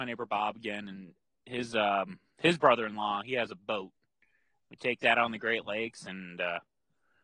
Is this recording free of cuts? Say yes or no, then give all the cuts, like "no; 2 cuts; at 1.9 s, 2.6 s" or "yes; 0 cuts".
yes; 0 cuts